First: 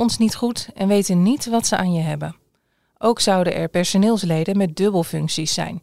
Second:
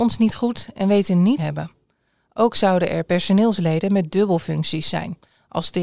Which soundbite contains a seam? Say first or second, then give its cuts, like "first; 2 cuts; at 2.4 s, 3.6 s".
second; 1 cut; at 1.4 s